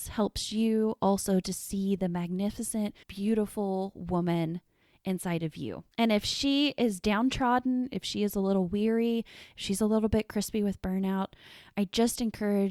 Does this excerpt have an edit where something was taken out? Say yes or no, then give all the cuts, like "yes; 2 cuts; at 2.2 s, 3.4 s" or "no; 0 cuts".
yes; 2 cuts; at 3.0 s, 5.9 s